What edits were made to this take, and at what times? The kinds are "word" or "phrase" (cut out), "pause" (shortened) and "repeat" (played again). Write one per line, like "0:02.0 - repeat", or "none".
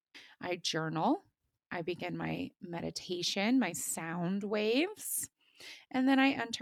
none

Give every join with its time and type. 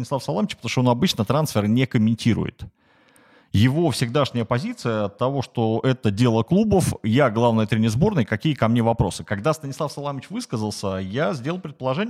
none

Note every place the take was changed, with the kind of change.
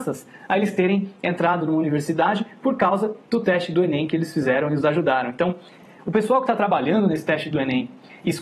none

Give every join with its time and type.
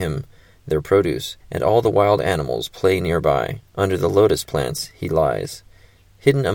0:01.4 - pause
0:03.7 - pause

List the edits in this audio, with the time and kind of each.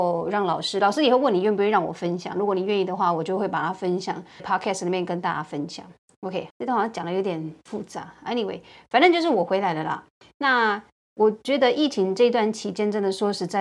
0:04.4 - phrase
0:06.5 - word

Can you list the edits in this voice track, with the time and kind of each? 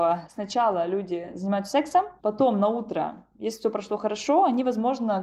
none

